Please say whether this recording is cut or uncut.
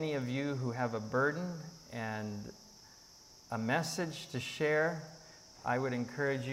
uncut